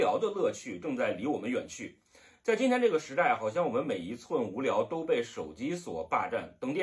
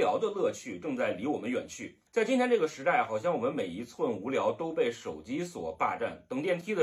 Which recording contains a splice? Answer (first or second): second